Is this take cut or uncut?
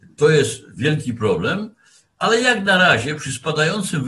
uncut